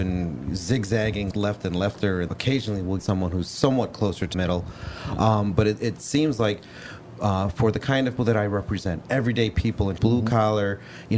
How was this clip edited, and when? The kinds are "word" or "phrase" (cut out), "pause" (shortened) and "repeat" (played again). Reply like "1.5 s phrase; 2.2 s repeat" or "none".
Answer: 1.3 s word; 2.3 s word; 3.0 s word; 4.3 s word; 8.2 s word; 10.0 s word